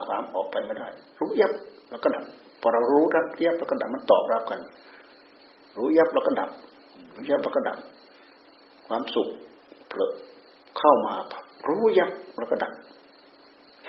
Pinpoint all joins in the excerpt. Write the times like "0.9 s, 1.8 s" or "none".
none